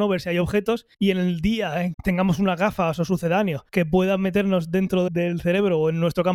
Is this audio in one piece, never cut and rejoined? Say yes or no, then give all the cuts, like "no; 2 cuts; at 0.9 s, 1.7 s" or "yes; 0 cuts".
no; 4 cuts; at 0.9 s, 1.9 s, 3.7 s, 5.1 s